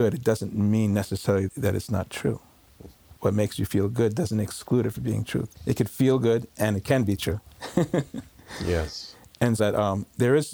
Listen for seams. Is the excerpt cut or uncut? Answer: cut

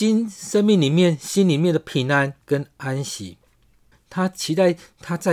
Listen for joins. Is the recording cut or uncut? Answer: cut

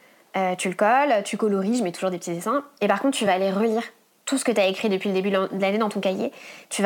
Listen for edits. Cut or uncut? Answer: uncut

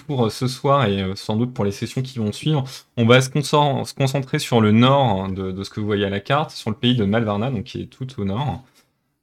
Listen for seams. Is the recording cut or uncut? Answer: uncut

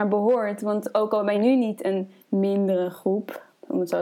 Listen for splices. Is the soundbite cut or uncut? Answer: cut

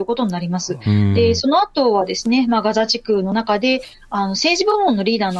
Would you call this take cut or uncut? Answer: uncut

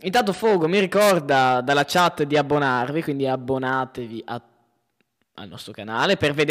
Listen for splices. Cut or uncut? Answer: uncut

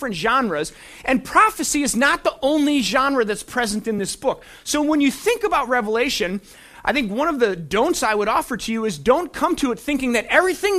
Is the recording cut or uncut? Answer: uncut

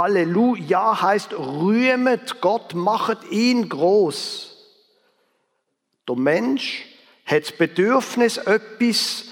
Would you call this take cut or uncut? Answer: uncut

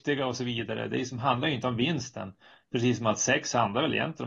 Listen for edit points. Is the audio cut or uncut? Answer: uncut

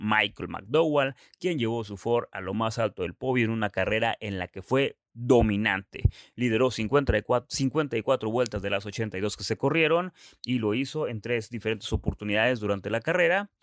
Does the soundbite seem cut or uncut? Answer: uncut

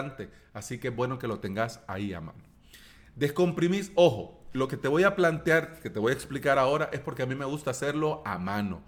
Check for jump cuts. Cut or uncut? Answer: uncut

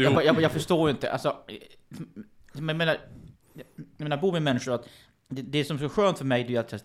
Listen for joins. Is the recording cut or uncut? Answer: uncut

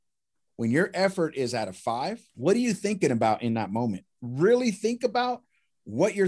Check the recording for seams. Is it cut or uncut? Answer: cut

